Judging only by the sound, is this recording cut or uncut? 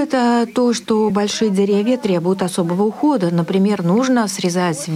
uncut